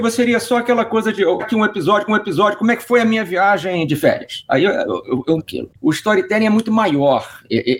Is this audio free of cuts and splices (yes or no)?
no